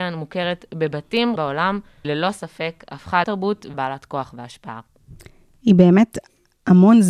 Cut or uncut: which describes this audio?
cut